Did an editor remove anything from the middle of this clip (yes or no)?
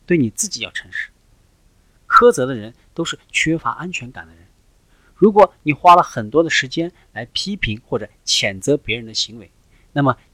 no